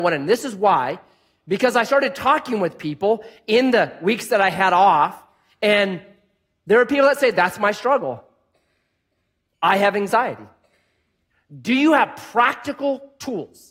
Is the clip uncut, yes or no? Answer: yes